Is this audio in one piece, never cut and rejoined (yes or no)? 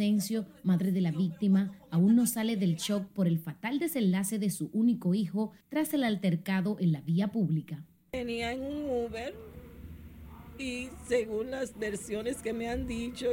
yes